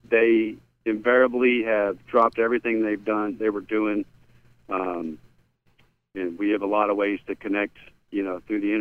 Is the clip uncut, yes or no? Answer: yes